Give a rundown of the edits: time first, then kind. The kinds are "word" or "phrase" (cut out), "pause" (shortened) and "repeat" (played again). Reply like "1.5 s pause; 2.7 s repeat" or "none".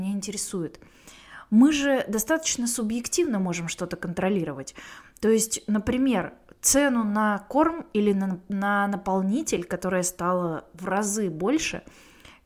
none